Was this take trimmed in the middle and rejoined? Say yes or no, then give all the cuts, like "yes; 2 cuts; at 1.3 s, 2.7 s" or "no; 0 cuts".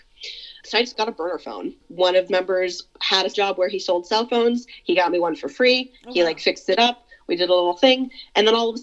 yes; 2 cuts; at 2.3 s, 3.3 s